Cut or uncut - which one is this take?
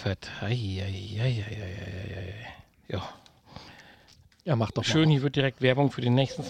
uncut